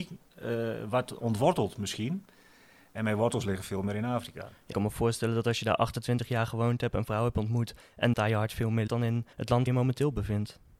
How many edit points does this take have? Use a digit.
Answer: 5